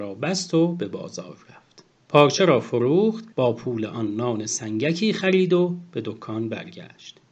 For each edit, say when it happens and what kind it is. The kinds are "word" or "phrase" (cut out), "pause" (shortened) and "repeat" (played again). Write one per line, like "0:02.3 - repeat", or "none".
0:01.9 - pause
0:03.3 - pause